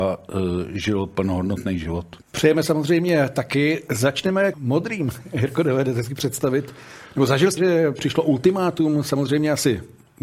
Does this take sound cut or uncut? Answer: cut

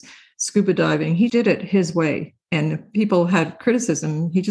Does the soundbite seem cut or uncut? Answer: cut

